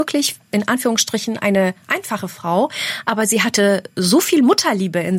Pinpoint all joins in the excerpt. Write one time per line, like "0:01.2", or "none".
none

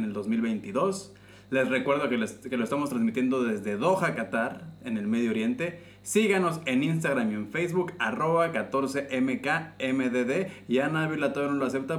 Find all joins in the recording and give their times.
none

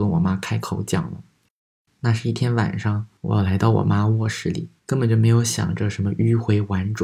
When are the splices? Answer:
0:03.2
0:04.8

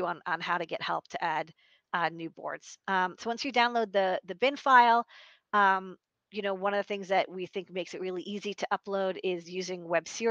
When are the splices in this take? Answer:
none

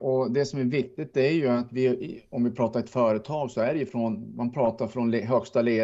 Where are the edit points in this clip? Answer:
none

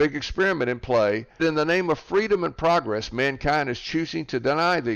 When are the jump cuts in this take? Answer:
0:01.4

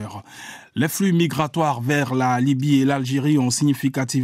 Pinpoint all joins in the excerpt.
none

